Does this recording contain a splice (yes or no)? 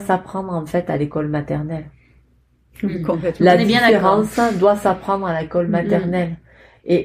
no